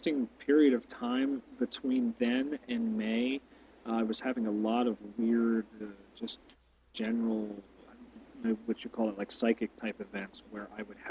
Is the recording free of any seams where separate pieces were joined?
yes; 0 cuts

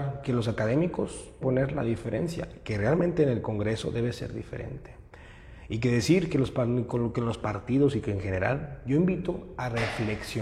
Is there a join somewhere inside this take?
yes; 1 cut; at 1.4 s

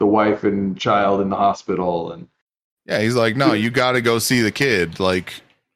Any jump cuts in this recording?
no; 0 cuts

